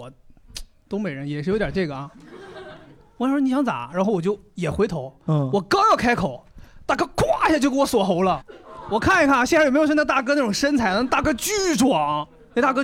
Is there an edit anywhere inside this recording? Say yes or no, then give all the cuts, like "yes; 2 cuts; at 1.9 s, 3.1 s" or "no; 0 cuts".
no; 0 cuts